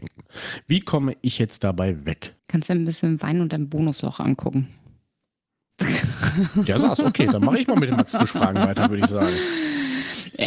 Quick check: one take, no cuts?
no; 1 cut; at 2.4 s

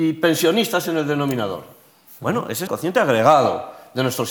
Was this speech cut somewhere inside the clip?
yes; 1 cut; at 2.7 s

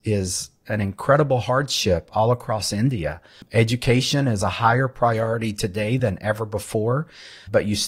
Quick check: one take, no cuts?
yes; 0 cuts

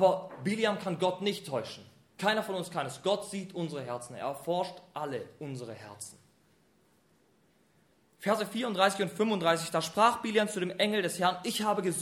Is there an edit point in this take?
no; 0 cuts

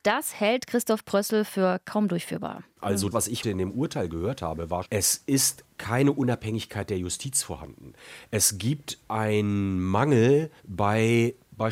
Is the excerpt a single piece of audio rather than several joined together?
no; 5 cuts; at 3.1 s, 3.4 s, 4.8 s, 5.7 s, 10.6 s

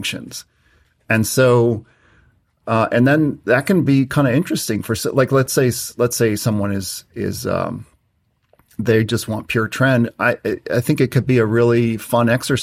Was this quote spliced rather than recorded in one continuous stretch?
no; 0 cuts

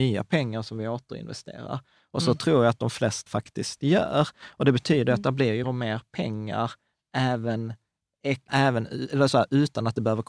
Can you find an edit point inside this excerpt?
yes; 3 cuts; at 3.3 s, 5.6 s, 8.5 s

